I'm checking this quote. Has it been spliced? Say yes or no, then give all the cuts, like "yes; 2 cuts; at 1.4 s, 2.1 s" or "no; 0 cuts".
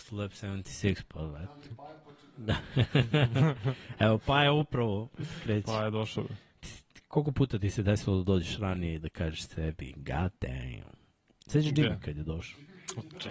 no; 0 cuts